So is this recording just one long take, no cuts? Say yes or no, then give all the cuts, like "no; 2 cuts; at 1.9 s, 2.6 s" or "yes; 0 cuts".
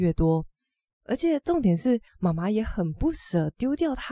no; 1 cut; at 2.1 s